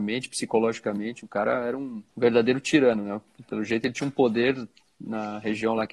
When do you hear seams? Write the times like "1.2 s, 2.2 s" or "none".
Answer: 2.1 s